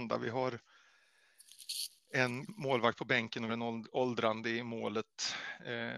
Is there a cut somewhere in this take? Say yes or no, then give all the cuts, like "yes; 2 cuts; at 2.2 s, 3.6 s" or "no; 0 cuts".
yes; 2 cuts; at 2.5 s, 3.5 s